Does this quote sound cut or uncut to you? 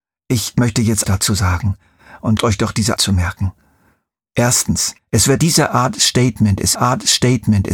cut